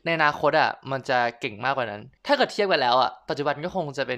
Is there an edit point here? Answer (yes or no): yes